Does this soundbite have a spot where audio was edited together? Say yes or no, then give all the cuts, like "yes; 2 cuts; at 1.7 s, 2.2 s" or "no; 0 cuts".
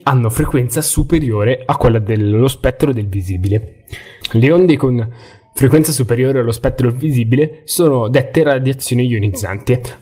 no; 0 cuts